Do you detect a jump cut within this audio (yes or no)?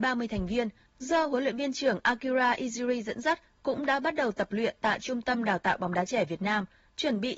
no